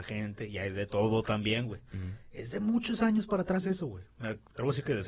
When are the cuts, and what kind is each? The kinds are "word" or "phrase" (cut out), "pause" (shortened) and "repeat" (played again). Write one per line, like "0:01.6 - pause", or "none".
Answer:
none